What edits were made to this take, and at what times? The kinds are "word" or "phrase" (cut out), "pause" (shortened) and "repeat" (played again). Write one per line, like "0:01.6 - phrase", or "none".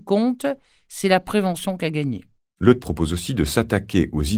0:02.8 - word

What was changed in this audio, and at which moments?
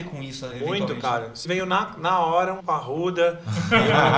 0:01.4 - word
0:02.6 - word

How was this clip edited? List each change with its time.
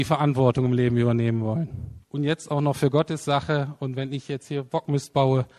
0:02.0 - pause

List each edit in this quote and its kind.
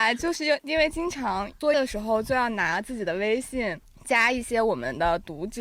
0:01.7 - word

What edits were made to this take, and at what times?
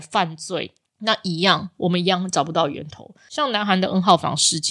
none

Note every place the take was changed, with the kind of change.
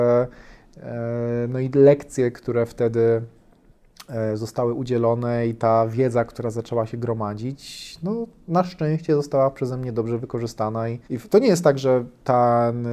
0:11.0 - pause

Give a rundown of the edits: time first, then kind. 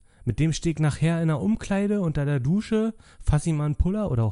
none

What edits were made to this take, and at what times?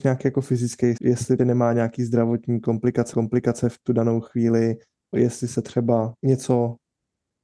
0:01.0 - word
0:01.4 - word
0:03.1 - repeat
0:05.1 - word
0:06.2 - pause

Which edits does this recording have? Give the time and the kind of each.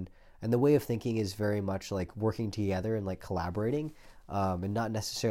none

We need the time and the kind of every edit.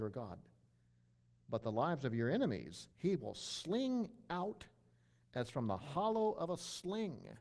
0:02.9 - pause

